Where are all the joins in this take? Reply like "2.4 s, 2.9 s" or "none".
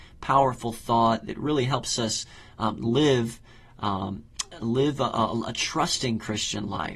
none